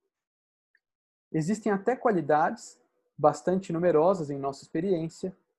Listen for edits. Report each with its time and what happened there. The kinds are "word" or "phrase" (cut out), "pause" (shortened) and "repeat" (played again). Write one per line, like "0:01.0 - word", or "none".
none